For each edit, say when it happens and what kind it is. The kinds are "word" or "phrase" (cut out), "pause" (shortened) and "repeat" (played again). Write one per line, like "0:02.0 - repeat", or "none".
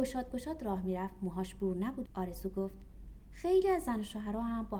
0:02.1 - phrase